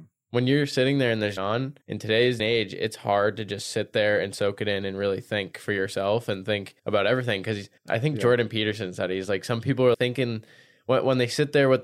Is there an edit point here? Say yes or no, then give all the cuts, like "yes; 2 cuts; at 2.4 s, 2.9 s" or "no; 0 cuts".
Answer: yes; 6 cuts; at 1.4 s, 1.8 s, 2.4 s, 6.8 s, 7.8 s, 9.9 s